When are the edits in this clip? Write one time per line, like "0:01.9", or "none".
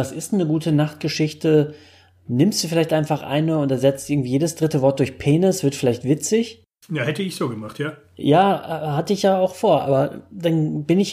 none